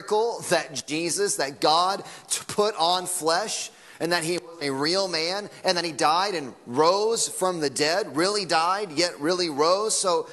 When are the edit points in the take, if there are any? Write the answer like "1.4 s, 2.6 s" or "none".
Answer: none